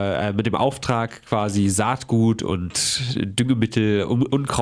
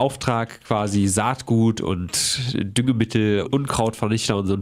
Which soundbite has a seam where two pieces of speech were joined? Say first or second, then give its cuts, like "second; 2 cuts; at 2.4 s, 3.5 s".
second; 1 cut; at 3.5 s